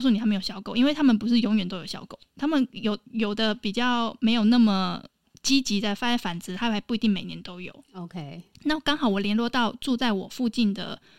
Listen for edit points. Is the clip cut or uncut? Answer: uncut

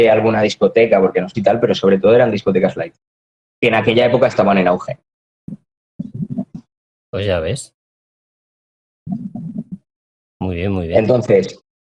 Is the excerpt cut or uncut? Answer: cut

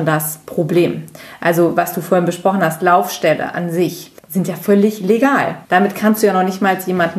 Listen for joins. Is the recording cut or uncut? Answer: cut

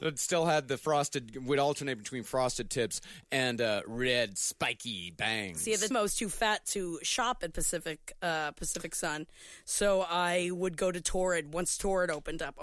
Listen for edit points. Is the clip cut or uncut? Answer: cut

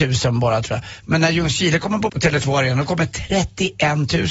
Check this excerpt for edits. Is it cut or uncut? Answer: cut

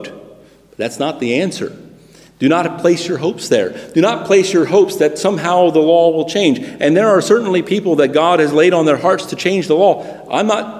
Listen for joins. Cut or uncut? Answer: uncut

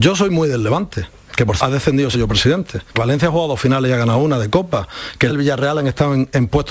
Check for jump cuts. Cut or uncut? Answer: cut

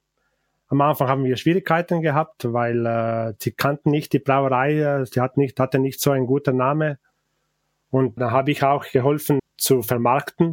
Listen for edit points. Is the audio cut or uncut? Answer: cut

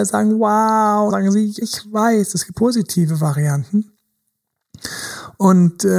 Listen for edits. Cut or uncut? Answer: cut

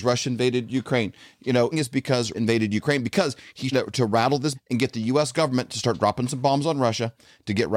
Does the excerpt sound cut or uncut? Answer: cut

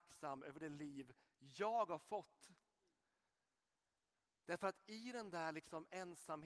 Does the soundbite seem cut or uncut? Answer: uncut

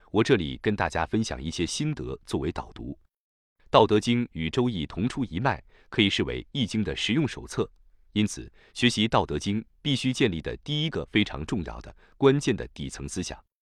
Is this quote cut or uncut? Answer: uncut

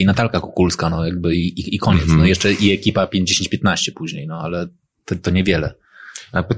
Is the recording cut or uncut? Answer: uncut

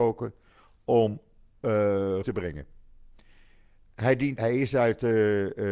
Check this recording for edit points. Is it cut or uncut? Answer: cut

